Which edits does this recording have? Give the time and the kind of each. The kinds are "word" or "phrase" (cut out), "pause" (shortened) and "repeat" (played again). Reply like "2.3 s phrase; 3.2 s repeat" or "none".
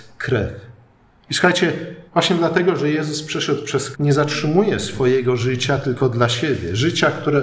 2.1 s pause; 3.9 s word